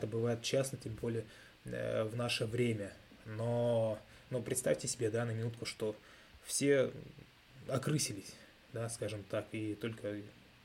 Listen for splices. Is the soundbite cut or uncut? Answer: uncut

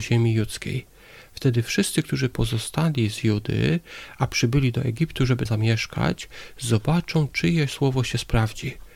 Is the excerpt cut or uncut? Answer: cut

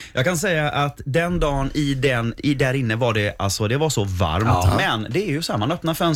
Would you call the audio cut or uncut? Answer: cut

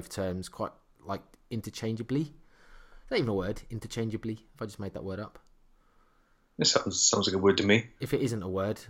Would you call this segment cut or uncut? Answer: uncut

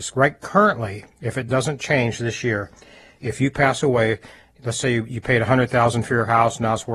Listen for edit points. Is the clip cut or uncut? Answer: uncut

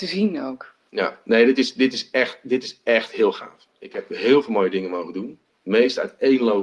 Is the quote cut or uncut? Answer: uncut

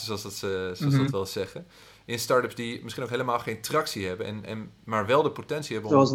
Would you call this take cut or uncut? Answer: uncut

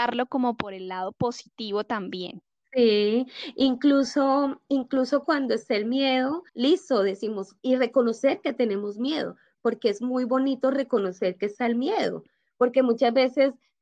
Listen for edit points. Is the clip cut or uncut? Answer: cut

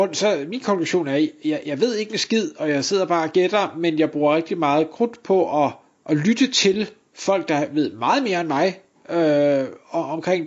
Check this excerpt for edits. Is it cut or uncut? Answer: uncut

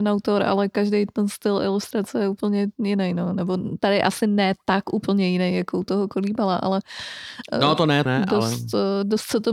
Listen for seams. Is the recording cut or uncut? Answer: cut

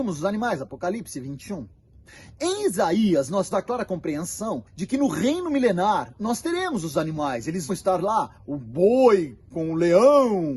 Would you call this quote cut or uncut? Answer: cut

